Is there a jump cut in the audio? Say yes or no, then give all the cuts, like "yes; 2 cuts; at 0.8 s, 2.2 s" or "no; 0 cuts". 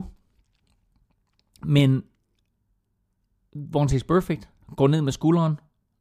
no; 0 cuts